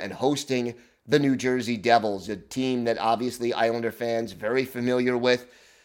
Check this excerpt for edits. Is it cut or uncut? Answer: uncut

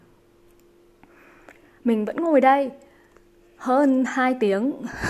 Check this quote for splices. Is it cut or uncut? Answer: uncut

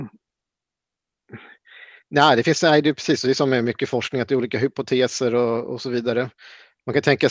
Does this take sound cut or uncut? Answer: uncut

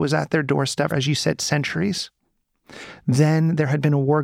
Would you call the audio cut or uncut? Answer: cut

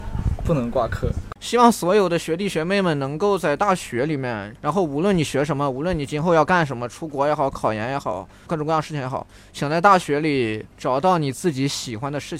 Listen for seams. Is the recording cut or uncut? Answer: cut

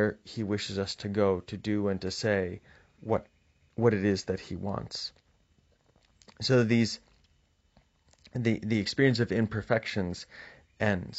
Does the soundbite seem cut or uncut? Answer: uncut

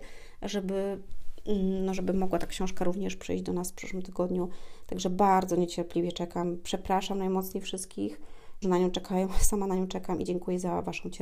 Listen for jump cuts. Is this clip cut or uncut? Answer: cut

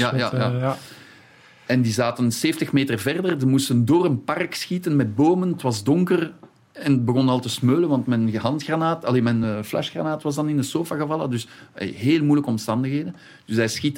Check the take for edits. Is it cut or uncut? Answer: uncut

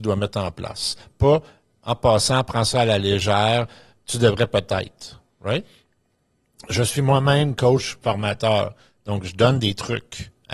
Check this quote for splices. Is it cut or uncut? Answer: uncut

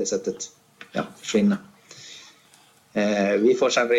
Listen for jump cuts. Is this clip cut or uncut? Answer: uncut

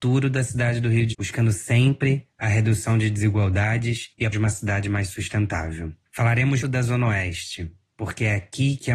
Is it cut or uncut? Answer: cut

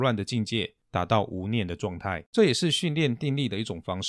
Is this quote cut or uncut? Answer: cut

